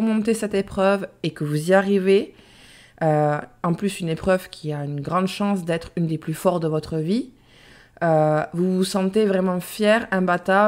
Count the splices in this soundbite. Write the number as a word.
zero